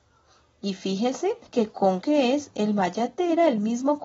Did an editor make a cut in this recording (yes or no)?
yes